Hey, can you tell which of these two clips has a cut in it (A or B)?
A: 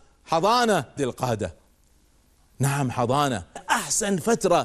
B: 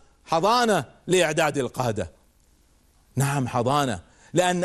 A